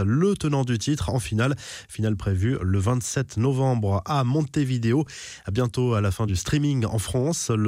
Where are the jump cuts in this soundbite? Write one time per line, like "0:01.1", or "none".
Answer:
none